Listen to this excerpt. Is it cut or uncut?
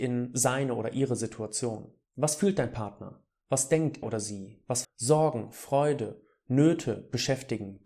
cut